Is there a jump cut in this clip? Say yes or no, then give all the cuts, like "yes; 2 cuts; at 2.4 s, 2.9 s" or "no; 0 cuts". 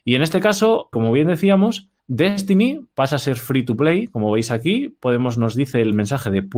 yes; 2 cuts; at 0.9 s, 2.0 s